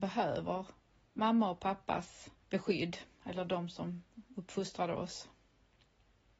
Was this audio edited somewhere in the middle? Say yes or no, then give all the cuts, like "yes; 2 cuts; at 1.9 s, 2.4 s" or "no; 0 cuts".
yes; 1 cut; at 2.4 s